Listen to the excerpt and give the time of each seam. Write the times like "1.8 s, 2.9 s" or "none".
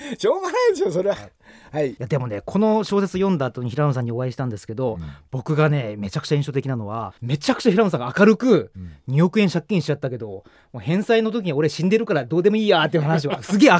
7.2 s